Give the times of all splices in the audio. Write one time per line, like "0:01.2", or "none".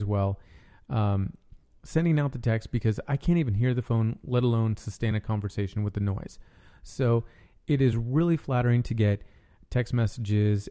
none